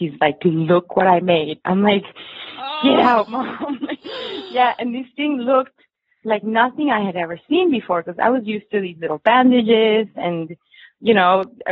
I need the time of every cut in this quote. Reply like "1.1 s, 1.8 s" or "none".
none

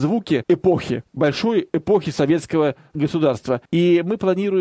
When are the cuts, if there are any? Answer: 3.7 s

